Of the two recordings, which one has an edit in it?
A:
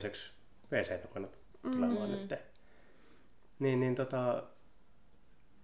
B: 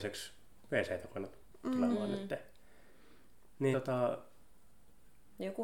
B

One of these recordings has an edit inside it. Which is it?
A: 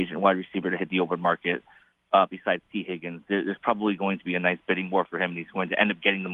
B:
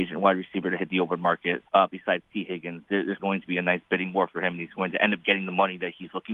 B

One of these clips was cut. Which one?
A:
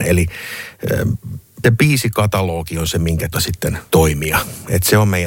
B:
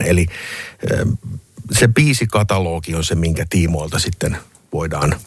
A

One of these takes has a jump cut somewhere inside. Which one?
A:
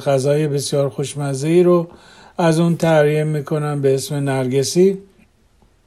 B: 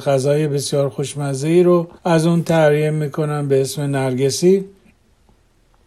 B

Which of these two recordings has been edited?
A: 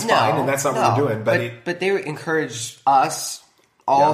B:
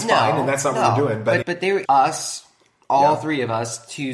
B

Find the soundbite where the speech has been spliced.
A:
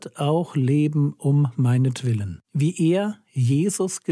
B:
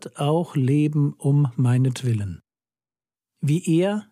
A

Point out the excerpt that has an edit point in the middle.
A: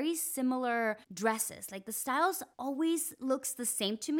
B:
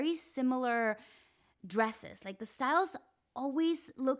A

